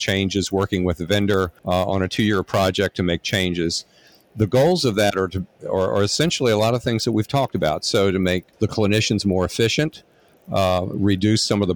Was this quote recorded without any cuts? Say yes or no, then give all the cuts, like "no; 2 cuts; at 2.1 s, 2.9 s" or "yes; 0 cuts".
yes; 0 cuts